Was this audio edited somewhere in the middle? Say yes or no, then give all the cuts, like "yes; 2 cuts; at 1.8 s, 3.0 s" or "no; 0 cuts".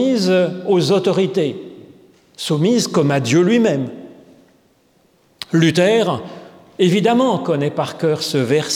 no; 0 cuts